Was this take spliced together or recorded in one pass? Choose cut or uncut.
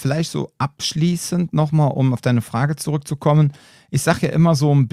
uncut